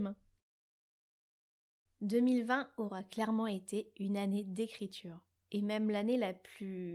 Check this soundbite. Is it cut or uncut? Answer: cut